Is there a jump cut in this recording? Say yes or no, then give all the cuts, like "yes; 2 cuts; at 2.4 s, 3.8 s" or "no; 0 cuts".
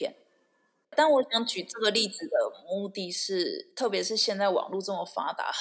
yes; 1 cut; at 3.7 s